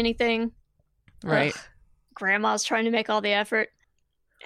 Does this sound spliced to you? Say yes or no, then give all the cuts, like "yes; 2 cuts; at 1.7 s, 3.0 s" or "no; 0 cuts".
no; 0 cuts